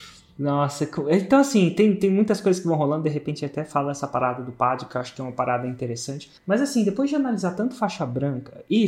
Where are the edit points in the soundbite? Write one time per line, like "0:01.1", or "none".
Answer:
0:06.4